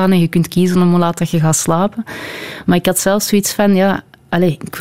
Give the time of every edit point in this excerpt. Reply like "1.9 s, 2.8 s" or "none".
none